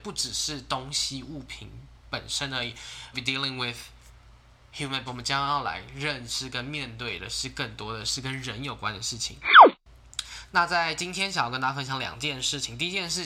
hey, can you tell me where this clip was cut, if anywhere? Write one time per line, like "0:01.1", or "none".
0:03.1
0:05.1